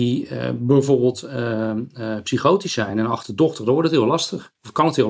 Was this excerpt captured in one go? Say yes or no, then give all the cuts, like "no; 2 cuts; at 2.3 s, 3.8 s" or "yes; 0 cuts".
yes; 0 cuts